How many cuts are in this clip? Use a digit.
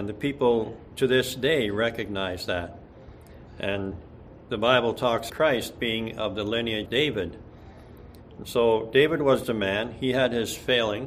4